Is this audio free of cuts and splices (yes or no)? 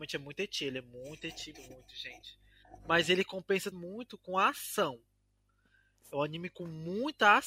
no